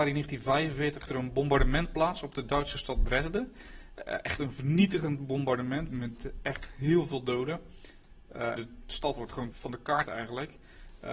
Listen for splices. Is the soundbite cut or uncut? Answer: cut